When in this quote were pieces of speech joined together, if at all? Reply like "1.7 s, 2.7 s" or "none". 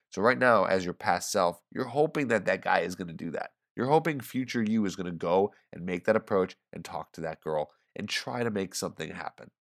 none